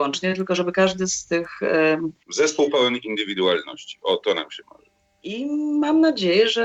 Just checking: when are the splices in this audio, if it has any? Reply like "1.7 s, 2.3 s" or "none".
none